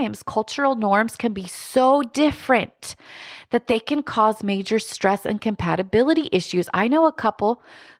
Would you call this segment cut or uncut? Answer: uncut